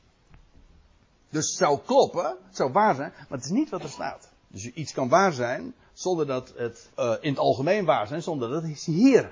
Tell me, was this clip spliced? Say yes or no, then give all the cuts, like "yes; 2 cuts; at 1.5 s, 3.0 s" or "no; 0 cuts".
yes; 2 cuts; at 4.4 s, 6.9 s